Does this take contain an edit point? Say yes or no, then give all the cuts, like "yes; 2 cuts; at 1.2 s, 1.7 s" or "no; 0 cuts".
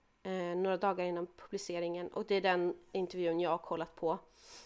no; 0 cuts